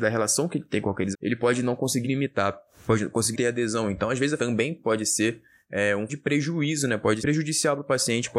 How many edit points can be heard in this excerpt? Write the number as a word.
seven